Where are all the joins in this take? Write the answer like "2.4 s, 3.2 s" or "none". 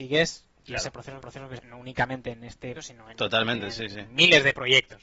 1.2 s, 1.6 s, 2.8 s